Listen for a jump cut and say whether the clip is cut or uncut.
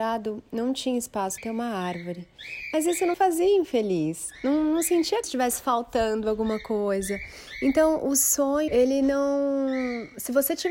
cut